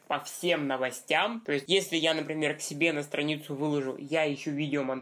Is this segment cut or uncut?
uncut